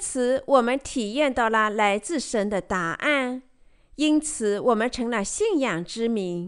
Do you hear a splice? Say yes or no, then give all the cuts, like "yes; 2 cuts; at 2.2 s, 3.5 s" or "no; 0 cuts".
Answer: no; 0 cuts